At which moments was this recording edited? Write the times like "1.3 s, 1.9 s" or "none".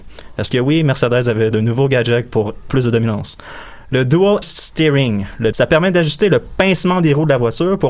1.5 s, 2.7 s, 4.4 s, 5.5 s